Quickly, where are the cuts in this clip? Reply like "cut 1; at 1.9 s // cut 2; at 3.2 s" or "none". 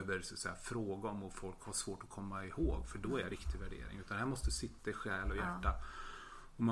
cut 1; at 3.3 s